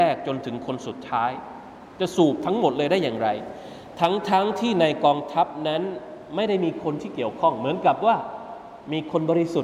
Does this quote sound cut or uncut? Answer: cut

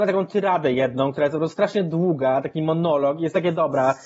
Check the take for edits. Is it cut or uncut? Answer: uncut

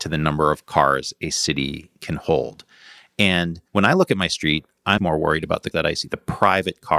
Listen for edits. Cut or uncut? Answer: cut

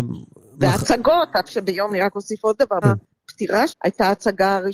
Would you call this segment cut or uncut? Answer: cut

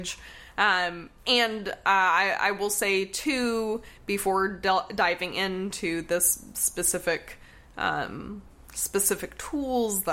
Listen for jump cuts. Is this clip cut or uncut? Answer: uncut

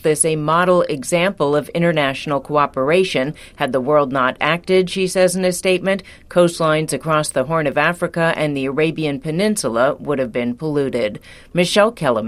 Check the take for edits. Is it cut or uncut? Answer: uncut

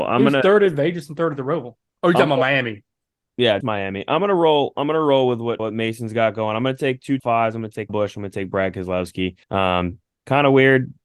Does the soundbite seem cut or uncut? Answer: cut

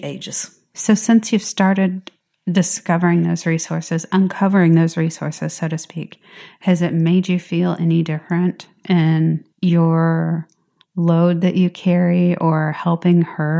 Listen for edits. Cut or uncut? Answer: cut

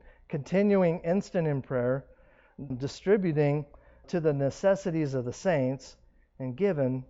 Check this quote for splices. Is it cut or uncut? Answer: cut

